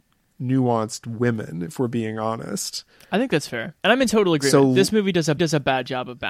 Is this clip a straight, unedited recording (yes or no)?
no